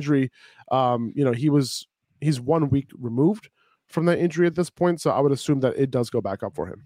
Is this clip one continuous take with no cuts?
yes; 0 cuts

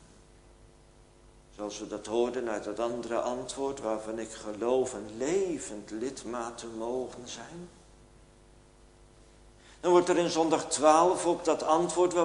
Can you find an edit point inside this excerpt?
no; 0 cuts

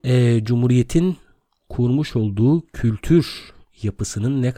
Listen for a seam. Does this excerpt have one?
no; 0 cuts

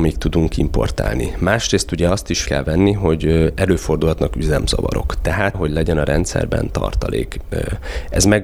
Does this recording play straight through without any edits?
no; 2 cuts; at 2.4 s, 5.5 s

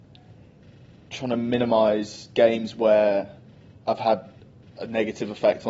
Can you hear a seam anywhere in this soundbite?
no; 0 cuts

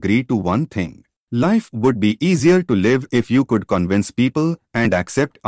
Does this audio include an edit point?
no; 0 cuts

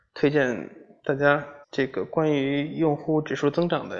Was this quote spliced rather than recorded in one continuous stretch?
yes; 1 cut; at 1.6 s

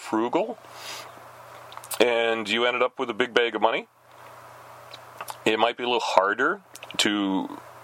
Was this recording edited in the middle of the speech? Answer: no; 0 cuts

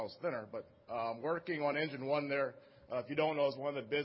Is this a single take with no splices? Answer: yes; 0 cuts

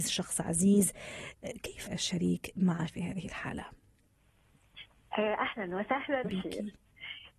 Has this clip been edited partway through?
yes; 3 cuts; at 1.9 s, 2.9 s, 6.2 s

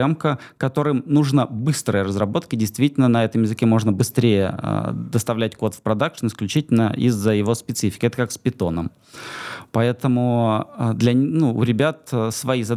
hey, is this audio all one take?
yes; 0 cuts

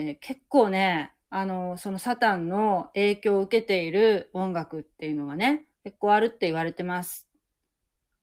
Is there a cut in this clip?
yes; 2 cuts; at 1.2 s, 5.7 s

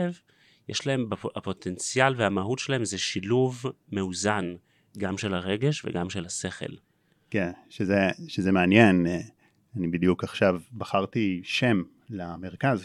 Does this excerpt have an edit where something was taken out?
no; 0 cuts

